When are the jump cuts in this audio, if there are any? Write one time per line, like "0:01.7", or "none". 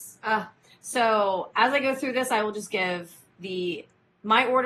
none